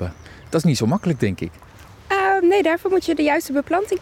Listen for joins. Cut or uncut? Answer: uncut